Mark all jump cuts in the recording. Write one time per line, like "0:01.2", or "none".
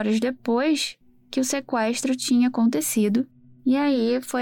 none